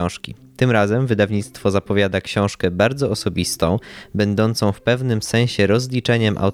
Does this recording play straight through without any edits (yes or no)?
yes